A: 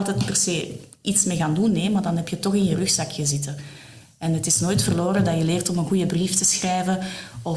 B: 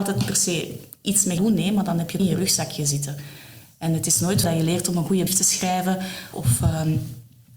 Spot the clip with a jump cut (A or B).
B